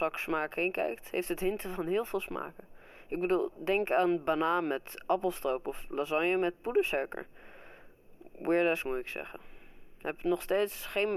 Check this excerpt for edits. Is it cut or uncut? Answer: cut